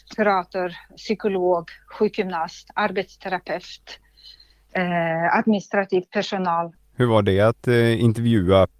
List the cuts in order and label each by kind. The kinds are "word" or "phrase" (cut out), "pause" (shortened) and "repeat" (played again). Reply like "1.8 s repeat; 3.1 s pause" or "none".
none